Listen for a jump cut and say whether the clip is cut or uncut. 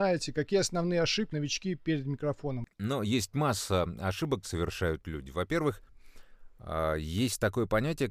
cut